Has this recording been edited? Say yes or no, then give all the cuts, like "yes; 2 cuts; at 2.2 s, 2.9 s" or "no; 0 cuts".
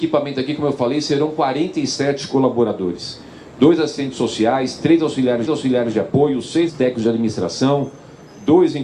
yes; 2 cuts; at 5.5 s, 6.7 s